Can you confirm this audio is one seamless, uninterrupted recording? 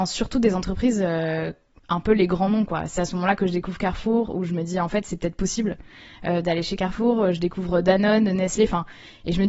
yes; 0 cuts

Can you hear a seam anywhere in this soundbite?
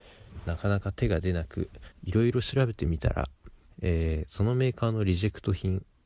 yes; 2 cuts; at 1.9 s, 3.7 s

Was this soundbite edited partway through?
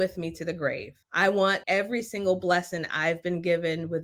yes; 2 cuts; at 1.0 s, 1.6 s

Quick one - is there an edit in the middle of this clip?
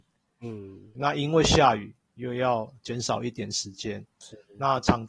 yes; 1 cut; at 0.9 s

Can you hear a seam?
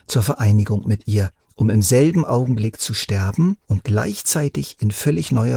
yes; 2 cuts; at 1.4 s, 3.6 s

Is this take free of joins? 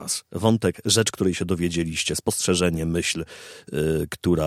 yes; 0 cuts

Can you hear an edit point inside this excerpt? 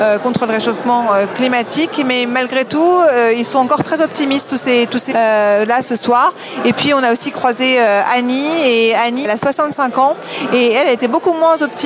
yes; 2 cuts; at 5.1 s, 9.2 s

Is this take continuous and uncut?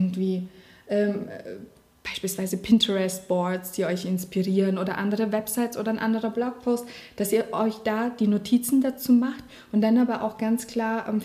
yes; 0 cuts

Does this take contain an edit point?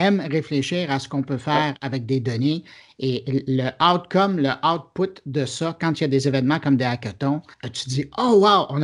yes; 1 cut; at 7.5 s

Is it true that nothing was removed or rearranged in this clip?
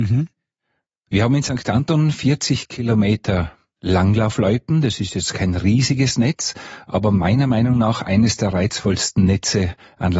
yes; 0 cuts

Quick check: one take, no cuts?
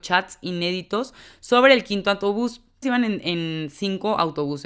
no; 1 cut; at 2.8 s

